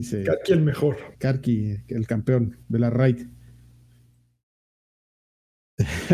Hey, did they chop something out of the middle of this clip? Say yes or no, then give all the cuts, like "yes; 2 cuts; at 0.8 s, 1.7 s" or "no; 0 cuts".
yes; 2 cuts; at 1.1 s, 2.6 s